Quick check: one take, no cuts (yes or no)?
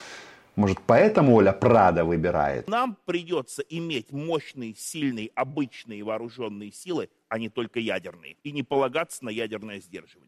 no